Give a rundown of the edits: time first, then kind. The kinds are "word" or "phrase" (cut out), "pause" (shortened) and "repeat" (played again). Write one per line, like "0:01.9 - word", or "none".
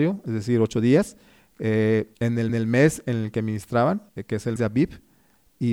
0:02.1 - pause
0:02.5 - repeat
0:04.1 - pause
0:04.6 - word